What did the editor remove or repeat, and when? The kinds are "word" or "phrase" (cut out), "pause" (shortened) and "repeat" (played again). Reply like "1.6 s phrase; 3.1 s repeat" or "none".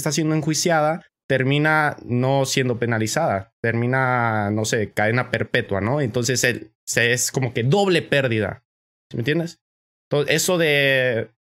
none